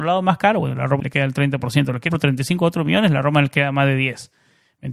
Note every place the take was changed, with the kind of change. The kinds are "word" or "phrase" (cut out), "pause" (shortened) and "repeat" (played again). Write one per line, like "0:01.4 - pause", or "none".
0:01.0 - word
0:02.1 - word